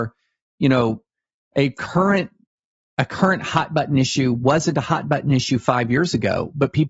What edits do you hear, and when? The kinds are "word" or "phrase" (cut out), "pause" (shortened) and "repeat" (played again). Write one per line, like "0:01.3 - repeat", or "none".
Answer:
none